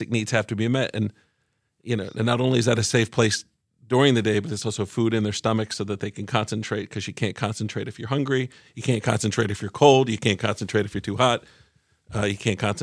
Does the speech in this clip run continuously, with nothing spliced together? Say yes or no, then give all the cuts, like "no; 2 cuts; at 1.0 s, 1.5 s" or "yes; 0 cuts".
yes; 0 cuts